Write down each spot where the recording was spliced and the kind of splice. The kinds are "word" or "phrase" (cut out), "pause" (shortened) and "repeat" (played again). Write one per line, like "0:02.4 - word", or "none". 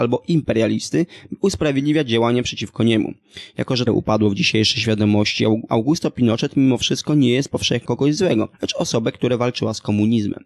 0:03.9 - phrase
0:07.9 - phrase